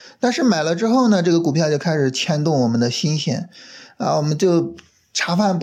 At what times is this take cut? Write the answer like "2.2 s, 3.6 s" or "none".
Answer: none